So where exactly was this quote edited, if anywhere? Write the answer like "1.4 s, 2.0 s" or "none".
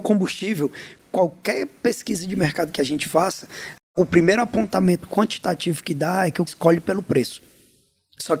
6.5 s